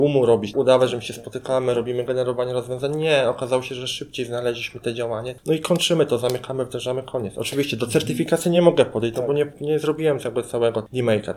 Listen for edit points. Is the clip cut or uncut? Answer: uncut